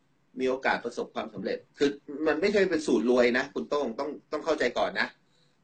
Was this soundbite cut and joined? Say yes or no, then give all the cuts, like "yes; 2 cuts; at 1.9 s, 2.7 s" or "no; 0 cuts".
yes; 1 cut; at 1.7 s